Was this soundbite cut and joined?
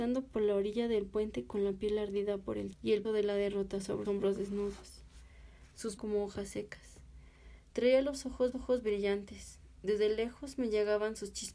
yes; 5 cuts; at 2.7 s, 3.0 s, 4.0 s, 6.0 s, 8.5 s

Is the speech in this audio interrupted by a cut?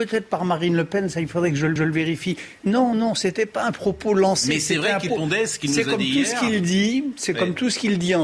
yes; 3 cuts; at 1.8 s, 2.9 s, 5.1 s

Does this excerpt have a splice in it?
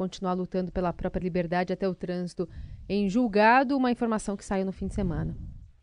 no; 0 cuts

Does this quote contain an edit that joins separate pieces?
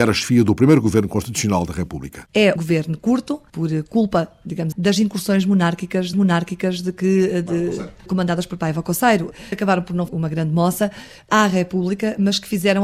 yes; 7 cuts; at 2.6 s, 3.5 s, 4.7 s, 6.1 s, 8.0 s, 9.5 s, 10.1 s

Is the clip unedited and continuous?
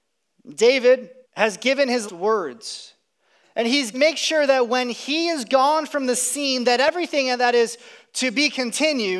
no; 3 cuts; at 1.2 s, 2.1 s, 3.9 s

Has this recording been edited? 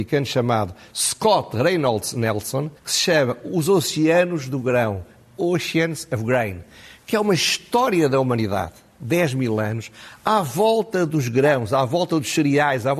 yes; 1 cut; at 2.8 s

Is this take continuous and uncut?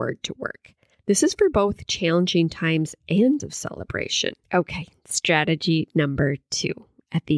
no; 2 cuts; at 3.4 s, 4.4 s

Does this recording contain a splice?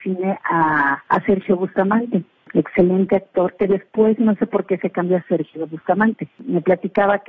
no; 0 cuts

